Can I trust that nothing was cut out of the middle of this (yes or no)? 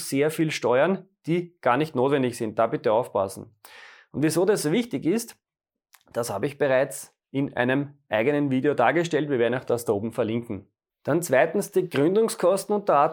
yes